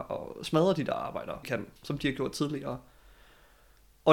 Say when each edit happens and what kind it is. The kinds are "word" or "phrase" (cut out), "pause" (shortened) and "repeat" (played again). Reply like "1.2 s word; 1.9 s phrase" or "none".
1.4 s phrase; 1.8 s pause